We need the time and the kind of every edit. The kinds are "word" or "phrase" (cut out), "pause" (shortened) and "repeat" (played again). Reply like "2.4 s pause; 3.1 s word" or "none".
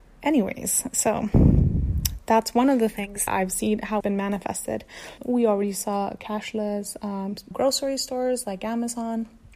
3.3 s word; 4.0 s word; 5.2 s word; 7.5 s word

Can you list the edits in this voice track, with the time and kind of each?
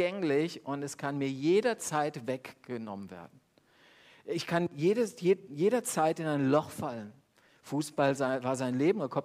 none

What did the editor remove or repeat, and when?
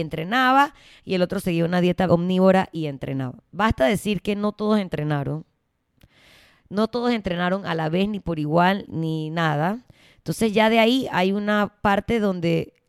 2.1 s word; 8.9 s word

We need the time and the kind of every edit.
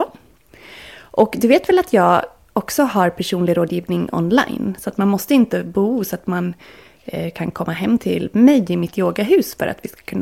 none

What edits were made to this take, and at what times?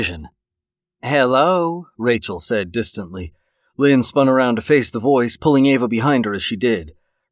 none

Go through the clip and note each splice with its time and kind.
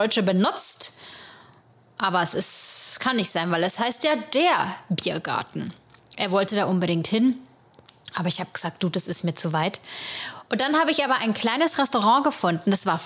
none

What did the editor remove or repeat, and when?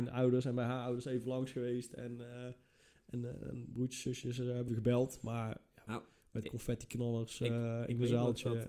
4.7 s word; 5.9 s phrase

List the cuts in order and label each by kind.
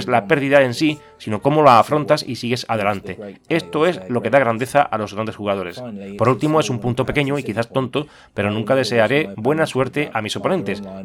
none

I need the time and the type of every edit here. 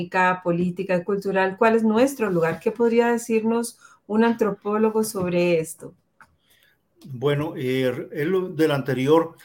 none

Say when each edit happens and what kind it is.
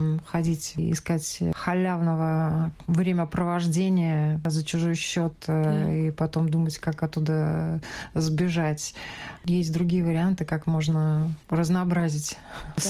11.4 s pause

